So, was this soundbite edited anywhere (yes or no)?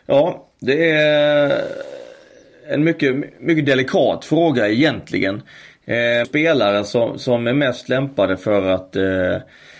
yes